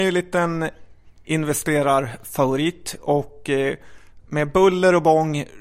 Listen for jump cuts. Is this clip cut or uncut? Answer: cut